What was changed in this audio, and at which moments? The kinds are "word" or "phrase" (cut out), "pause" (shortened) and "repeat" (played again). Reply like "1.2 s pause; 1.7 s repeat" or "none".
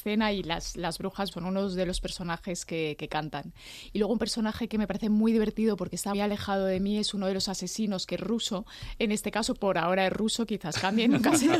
1.3 s word; 6.1 s word